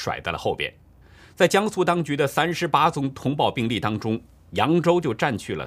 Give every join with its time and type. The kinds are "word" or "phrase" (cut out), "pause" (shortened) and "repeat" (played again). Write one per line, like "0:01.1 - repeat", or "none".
0:01.0 - pause